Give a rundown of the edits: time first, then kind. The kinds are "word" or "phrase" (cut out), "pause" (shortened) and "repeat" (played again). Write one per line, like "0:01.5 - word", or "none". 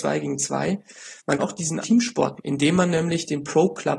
0:01.4 - word
0:01.8 - phrase
0:02.4 - word